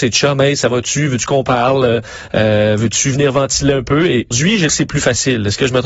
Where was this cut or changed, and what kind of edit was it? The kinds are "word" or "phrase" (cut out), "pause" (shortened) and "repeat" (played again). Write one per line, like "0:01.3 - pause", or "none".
0:04.3 - word
0:04.7 - word